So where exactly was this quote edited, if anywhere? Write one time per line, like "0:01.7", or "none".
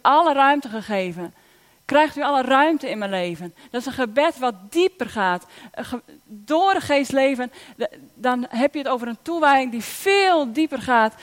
none